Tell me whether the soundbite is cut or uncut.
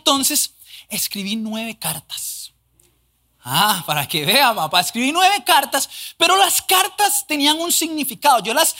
uncut